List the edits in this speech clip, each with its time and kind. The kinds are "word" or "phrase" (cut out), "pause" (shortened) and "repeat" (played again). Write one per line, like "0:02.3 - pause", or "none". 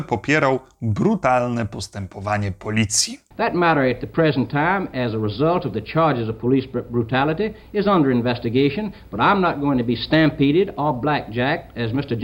none